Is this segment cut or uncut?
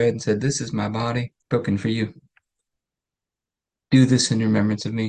cut